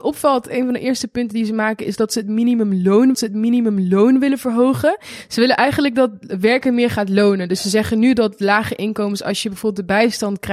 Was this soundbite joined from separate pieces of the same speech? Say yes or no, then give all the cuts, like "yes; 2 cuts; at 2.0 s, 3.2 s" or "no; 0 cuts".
yes; 1 cut; at 3.1 s